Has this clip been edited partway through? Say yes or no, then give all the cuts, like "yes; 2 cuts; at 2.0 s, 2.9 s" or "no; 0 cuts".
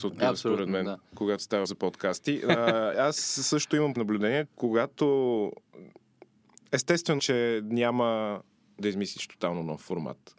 yes; 6 cuts; at 1.6 s, 2.9 s, 4.0 s, 4.5 s, 7.2 s, 8.8 s